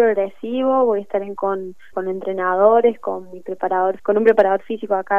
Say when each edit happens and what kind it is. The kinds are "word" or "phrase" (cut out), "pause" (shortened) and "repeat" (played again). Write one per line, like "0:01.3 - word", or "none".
0:01.4 - word
0:01.9 - word
0:04.0 - word